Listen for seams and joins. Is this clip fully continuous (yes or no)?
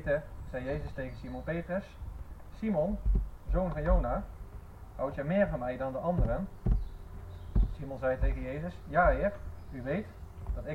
yes